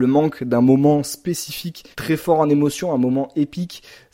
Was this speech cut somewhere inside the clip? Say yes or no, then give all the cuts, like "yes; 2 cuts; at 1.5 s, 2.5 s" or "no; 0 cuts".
yes; 1 cut; at 1.9 s